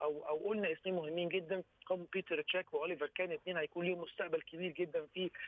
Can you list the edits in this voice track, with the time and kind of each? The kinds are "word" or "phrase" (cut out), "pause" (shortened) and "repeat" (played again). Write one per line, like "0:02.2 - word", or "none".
none